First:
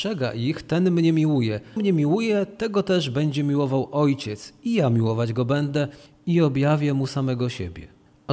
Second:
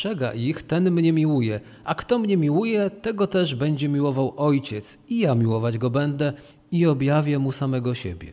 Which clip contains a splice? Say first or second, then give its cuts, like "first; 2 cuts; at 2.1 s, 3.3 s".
first; 1 cut; at 1.8 s